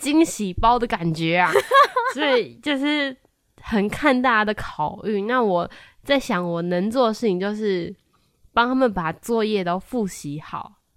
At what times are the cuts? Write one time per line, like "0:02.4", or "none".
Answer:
none